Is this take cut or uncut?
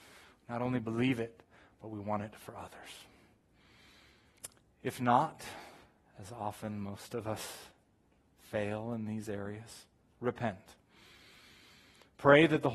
uncut